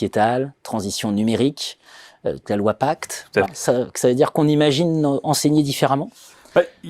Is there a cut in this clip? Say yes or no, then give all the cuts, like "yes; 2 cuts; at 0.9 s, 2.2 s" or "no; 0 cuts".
yes; 2 cuts; at 2.4 s, 3.5 s